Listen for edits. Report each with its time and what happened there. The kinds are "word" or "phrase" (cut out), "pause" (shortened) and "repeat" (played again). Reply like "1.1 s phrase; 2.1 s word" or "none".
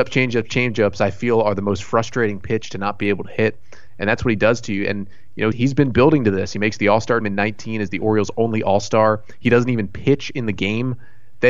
5.5 s word; 7.2 s word